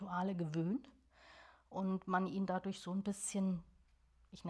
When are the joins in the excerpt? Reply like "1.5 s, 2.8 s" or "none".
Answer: none